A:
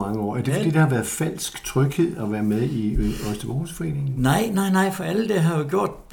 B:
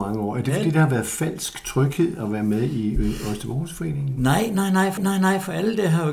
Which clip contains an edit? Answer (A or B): B